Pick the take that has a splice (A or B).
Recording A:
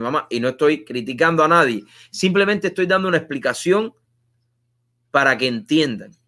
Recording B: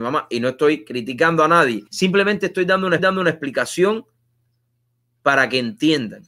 B